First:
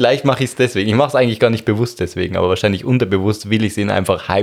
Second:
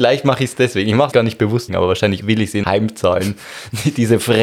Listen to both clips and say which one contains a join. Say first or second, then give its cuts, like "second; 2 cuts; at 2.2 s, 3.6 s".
second; 4 cuts; at 1.1 s, 1.7 s, 2.2 s, 2.6 s